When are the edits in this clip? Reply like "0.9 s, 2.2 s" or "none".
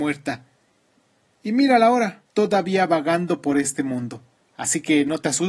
2.3 s, 4.3 s